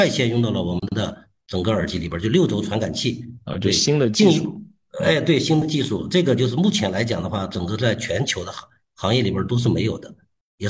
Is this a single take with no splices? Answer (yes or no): yes